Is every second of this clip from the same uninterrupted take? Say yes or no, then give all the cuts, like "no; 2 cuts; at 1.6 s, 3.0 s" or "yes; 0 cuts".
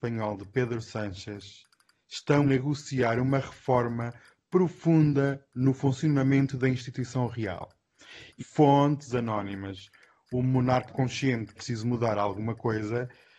no; 4 cuts; at 2.4 s, 8.4 s, 10.9 s, 11.6 s